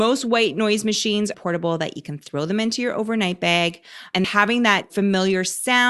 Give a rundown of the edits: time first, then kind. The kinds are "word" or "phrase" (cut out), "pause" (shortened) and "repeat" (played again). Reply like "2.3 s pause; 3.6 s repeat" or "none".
1.3 s phrase; 4.2 s word